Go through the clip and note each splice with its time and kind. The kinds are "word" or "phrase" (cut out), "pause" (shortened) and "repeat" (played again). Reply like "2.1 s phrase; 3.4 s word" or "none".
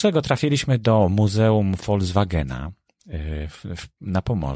none